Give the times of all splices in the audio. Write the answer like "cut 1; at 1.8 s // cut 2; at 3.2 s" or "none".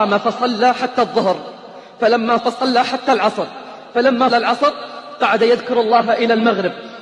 cut 1; at 2.4 s // cut 2; at 4.3 s